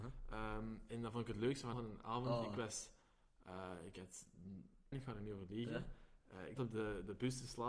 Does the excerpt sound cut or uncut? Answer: cut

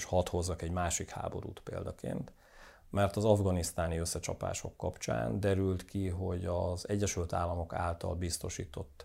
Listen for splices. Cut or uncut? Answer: uncut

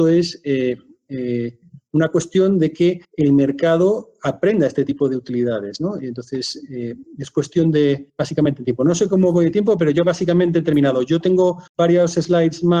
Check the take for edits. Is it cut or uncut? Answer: cut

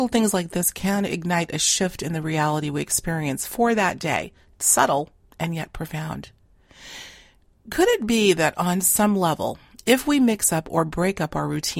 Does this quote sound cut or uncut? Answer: uncut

